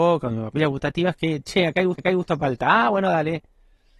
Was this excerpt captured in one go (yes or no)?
no